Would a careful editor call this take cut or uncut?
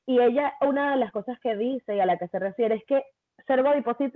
uncut